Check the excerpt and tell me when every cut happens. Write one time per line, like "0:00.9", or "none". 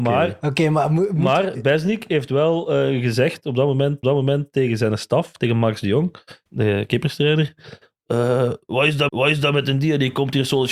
0:04.0
0:06.5
0:09.1